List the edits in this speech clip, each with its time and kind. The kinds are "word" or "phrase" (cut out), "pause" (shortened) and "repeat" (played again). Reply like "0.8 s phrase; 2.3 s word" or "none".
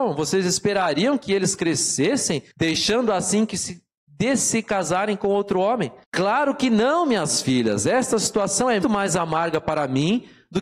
2.5 s pause; 6.0 s pause; 8.8 s word